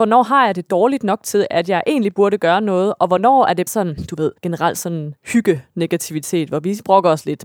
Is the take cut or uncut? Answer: cut